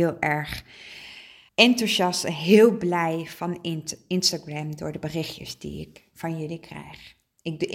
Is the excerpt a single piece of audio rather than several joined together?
no; 1 cut; at 1.5 s

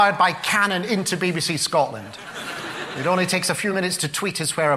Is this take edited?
no; 0 cuts

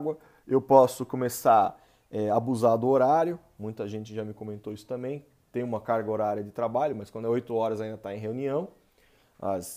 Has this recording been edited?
no; 0 cuts

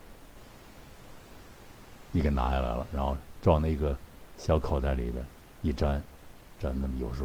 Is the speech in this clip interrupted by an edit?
yes; 1 cut; at 4.3 s

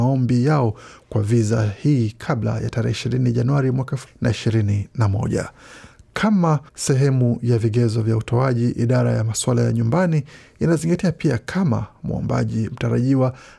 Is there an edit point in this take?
yes; 2 cuts; at 4.1 s, 6.7 s

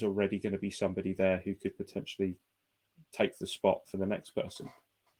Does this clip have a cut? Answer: no; 0 cuts

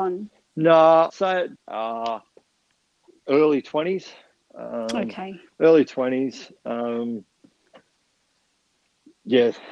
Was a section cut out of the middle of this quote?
yes; 3 cuts; at 1.1 s, 1.6 s, 4.3 s

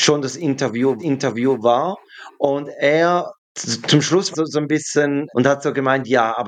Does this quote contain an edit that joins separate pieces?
yes; 4 cuts; at 1.0 s, 3.4 s, 4.3 s, 5.3 s

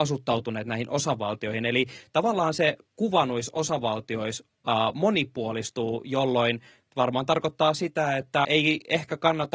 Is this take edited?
yes; 1 cut; at 8.4 s

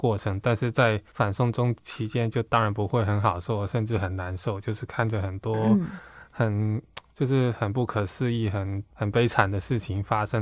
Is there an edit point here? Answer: yes; 2 cuts; at 1.1 s, 8.9 s

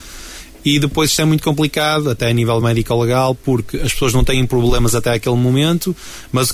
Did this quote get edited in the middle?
no; 0 cuts

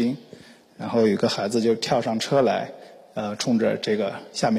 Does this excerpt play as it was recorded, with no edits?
yes; 0 cuts

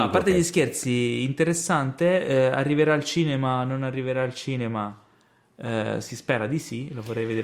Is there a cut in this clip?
no; 0 cuts

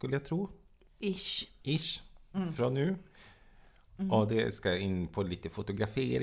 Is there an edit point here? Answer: no; 0 cuts

